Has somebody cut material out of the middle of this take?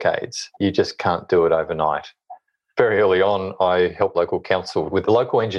yes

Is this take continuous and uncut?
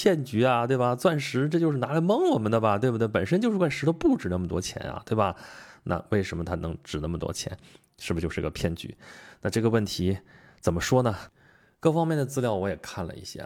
yes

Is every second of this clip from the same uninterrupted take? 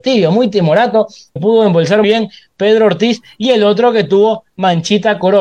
no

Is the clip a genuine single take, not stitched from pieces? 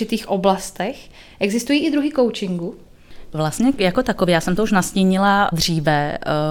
no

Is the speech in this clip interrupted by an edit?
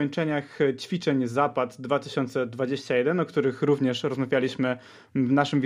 no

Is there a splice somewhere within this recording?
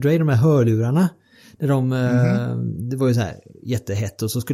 no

